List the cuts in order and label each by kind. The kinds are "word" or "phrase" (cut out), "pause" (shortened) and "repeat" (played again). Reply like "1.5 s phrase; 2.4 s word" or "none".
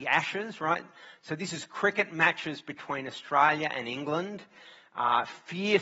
none